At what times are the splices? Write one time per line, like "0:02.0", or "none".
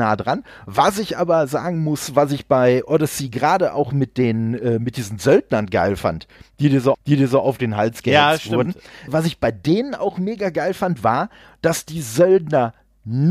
0:06.9
0:09.1